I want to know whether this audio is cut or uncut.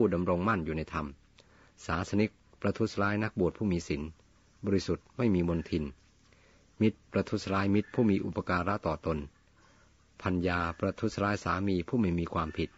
uncut